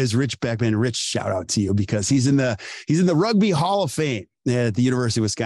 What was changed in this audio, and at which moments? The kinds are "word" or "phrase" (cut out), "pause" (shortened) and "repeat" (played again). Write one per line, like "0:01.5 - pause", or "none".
none